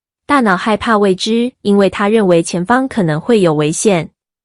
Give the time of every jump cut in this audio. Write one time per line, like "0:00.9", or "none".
0:01.5